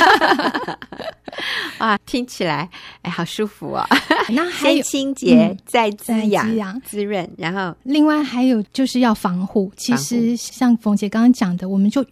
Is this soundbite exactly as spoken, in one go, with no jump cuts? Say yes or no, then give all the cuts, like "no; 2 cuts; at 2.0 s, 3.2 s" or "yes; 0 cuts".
no; 3 cuts; at 2.0 s, 4.3 s, 6.8 s